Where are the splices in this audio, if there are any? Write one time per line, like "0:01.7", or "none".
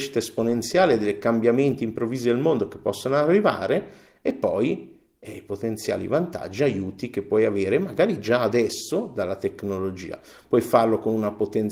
none